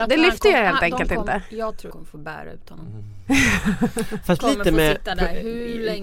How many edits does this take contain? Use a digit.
2